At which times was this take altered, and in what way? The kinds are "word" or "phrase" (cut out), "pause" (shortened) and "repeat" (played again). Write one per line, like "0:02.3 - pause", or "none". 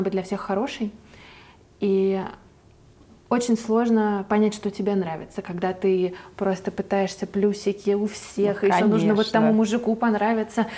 none